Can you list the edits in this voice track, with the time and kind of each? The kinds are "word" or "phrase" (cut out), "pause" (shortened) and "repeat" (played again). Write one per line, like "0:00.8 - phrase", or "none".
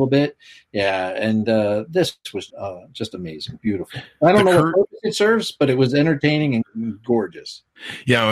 0:02.5 - word